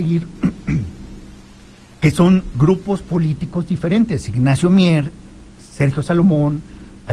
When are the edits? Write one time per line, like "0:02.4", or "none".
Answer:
none